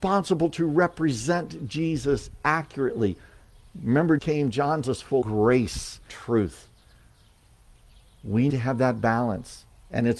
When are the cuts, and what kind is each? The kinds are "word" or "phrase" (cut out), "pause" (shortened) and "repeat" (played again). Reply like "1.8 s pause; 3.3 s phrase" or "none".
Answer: 4.2 s word; 4.8 s word; 5.2 s word; 6.1 s word; 8.5 s word